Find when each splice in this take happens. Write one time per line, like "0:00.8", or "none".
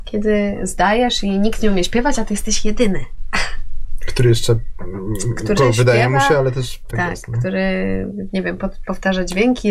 0:05.6
0:06.9